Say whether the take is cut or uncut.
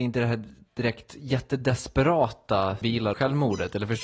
cut